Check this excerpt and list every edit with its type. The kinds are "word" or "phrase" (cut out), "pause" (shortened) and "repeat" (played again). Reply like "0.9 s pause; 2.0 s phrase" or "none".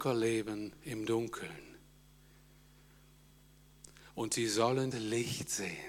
4.9 s phrase